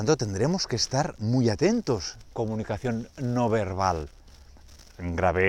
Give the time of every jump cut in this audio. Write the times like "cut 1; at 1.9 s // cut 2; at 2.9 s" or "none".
cut 1; at 2.3 s